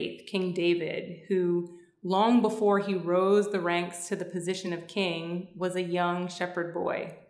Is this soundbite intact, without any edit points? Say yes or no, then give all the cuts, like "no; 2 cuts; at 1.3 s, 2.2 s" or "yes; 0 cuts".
yes; 0 cuts